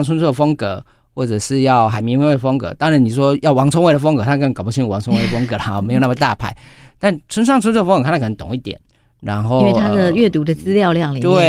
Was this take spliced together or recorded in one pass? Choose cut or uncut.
uncut